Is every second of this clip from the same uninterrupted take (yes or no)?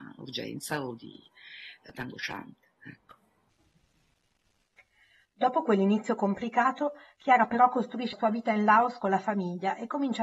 no